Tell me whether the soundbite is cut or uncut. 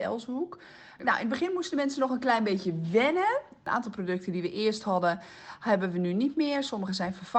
uncut